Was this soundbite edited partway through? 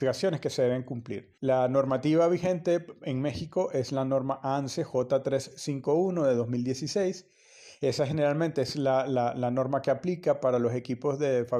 yes; 1 cut; at 1.4 s

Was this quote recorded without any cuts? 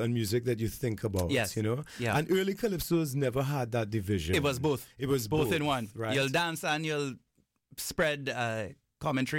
yes; 0 cuts

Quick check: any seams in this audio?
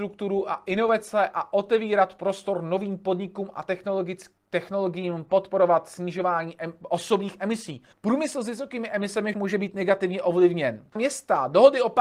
yes; 3 cuts; at 7.9 s, 9.3 s, 11.0 s

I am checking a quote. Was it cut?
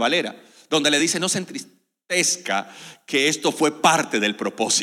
no; 0 cuts

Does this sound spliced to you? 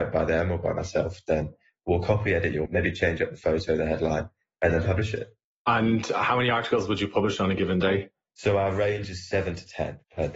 yes; 1 cut; at 2.7 s

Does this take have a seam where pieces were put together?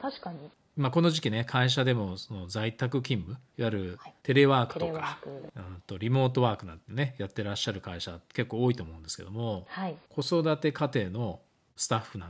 yes; 3 cuts; at 3.5 s, 4.2 s, 10.0 s

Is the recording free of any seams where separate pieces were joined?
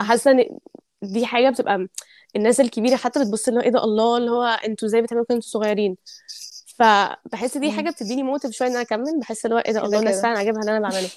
yes; 0 cuts

